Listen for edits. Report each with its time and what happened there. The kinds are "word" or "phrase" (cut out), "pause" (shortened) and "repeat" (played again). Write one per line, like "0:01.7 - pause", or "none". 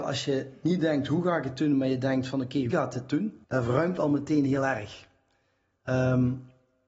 0:02.7 - word
0:03.4 - pause